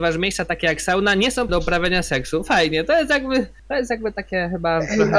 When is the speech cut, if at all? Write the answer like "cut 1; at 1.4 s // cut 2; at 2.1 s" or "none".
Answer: cut 1; at 1.5 s